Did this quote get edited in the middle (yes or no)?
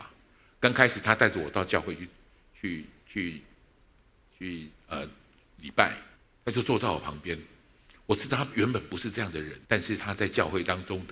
yes